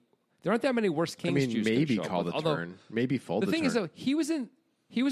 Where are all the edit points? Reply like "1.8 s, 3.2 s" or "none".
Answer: none